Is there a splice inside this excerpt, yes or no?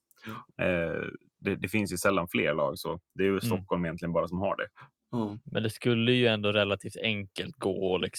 yes